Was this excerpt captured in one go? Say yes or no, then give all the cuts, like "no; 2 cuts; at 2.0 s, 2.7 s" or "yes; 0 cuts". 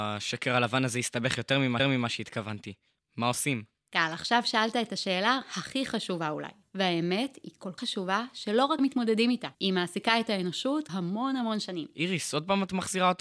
no; 6 cuts; at 1.8 s, 6.6 s, 7.8 s, 8.8 s, 9.5 s, 10.9 s